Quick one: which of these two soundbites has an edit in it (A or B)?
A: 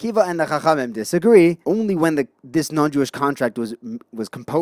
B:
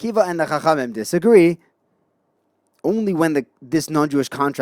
A